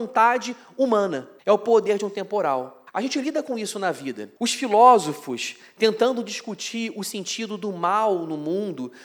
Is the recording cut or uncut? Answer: cut